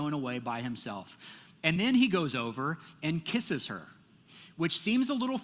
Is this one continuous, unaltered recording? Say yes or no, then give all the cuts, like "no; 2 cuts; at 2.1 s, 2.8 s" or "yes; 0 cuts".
yes; 0 cuts